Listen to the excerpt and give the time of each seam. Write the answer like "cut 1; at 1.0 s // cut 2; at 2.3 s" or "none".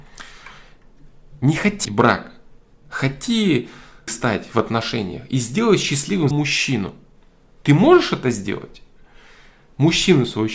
cut 1; at 1.8 s // cut 2; at 4.1 s // cut 3; at 6.3 s